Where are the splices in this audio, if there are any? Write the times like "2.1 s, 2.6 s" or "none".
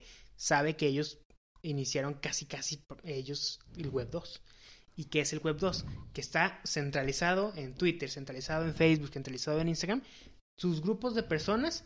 none